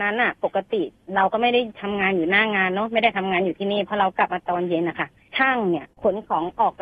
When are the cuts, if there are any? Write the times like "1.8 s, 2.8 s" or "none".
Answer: 5.9 s